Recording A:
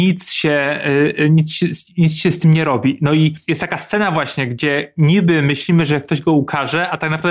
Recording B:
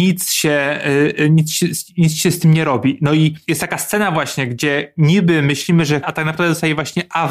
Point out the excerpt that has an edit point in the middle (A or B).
B